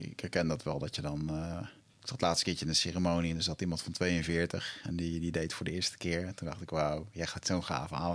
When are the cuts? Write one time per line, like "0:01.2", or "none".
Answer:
0:01.8